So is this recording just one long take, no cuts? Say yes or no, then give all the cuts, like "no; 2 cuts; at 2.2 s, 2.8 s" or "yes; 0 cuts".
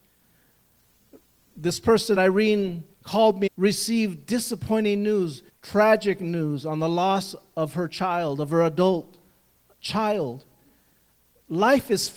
no; 4 cuts; at 2.2 s, 2.9 s, 3.5 s, 5.5 s